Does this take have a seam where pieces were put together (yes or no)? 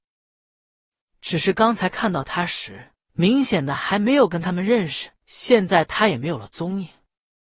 yes